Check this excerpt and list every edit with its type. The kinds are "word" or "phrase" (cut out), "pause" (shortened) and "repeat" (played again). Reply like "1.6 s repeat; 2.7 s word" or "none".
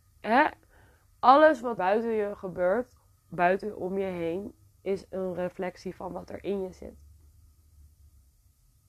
1.8 s word